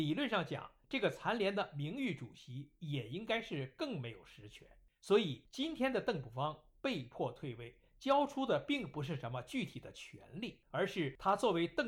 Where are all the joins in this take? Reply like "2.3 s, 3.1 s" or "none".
none

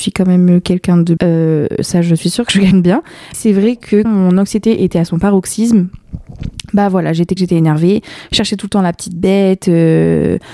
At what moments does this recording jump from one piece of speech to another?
1.2 s, 2.7 s, 3.3 s, 4.0 s, 7.4 s

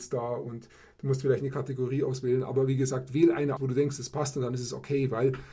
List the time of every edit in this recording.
3.6 s

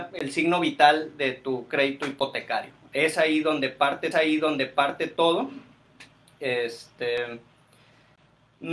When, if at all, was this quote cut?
4.1 s

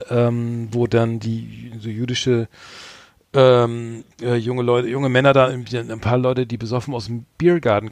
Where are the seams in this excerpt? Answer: 4.1 s

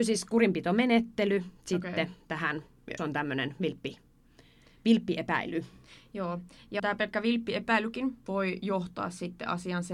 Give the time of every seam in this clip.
3.0 s, 6.8 s

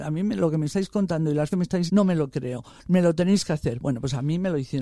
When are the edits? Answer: 1.5 s, 1.9 s

